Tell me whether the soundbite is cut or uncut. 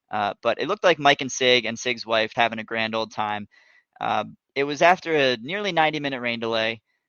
cut